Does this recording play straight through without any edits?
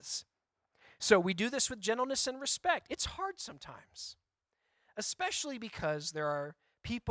yes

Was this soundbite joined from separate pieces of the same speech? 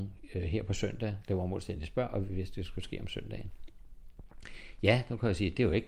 no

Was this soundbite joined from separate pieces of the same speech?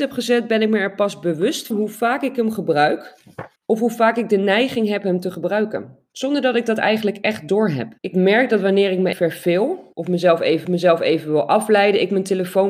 yes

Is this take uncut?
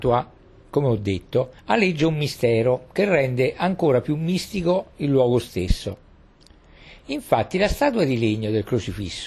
no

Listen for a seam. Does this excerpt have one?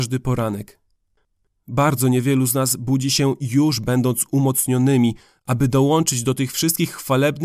no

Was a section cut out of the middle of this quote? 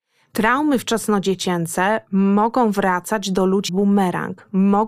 yes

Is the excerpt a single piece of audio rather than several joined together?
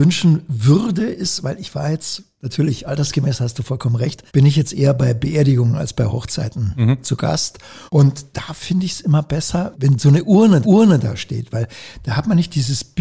no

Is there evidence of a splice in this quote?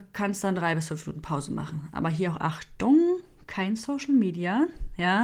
no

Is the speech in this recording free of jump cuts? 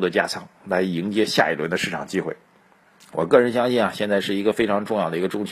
no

